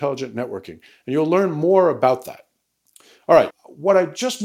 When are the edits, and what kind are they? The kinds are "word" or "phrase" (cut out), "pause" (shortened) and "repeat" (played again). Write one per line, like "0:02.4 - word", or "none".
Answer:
0:03.5 - word